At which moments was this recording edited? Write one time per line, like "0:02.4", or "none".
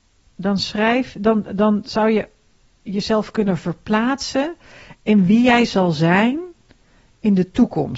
none